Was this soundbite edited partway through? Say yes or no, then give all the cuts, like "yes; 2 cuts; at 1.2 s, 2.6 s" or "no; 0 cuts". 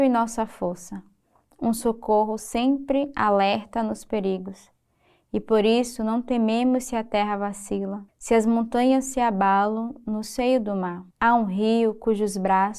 yes; 2 cuts; at 8.1 s, 11.1 s